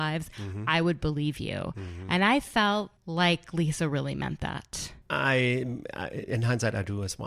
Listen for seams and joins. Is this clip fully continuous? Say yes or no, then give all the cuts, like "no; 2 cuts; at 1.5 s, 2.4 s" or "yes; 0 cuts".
no; 2 cuts; at 3.0 s, 5.0 s